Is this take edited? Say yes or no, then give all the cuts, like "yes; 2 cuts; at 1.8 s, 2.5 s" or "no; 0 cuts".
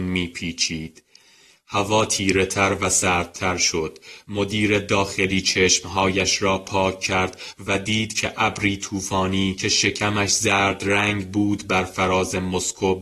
no; 0 cuts